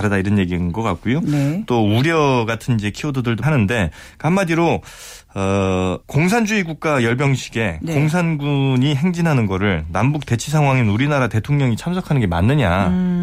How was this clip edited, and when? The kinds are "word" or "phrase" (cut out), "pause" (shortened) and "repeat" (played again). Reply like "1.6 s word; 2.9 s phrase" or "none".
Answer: 3.4 s phrase; 6.0 s pause